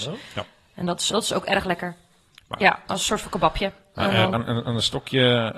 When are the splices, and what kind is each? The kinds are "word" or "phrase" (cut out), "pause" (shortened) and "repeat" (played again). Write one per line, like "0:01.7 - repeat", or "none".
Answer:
0:01.1 - word
0:04.3 - word